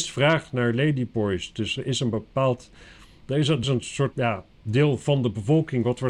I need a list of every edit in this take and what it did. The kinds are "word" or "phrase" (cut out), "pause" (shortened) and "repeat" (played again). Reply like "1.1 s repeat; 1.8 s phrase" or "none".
3.6 s word; 4.1 s word